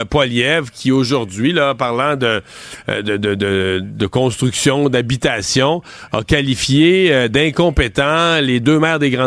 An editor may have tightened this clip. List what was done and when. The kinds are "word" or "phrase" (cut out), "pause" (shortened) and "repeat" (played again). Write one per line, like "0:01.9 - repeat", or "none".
none